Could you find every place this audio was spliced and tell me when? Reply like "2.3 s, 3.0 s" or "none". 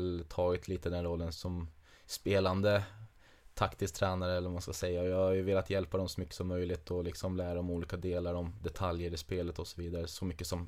1.3 s